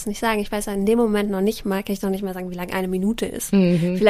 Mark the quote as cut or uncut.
uncut